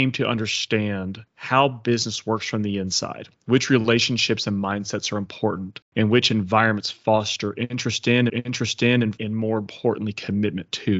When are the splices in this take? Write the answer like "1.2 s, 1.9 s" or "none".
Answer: 1.3 s, 5.8 s, 8.3 s